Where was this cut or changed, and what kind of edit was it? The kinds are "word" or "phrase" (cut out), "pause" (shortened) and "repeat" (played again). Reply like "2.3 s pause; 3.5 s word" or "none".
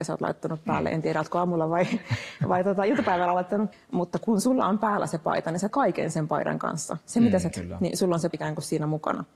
3.7 s word; 5.7 s word; 7.5 s word; 8.3 s word